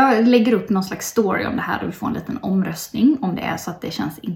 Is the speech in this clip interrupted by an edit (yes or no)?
no